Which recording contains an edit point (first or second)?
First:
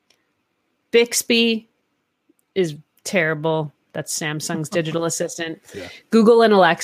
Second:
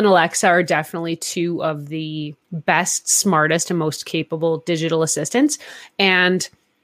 second